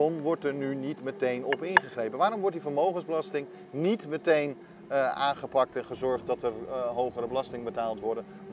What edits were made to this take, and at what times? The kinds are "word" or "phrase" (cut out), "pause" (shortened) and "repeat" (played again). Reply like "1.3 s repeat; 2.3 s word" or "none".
none